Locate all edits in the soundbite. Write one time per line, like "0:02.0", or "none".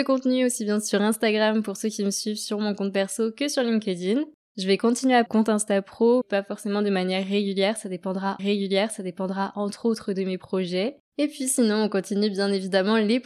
0:05.3
0:06.2
0:08.4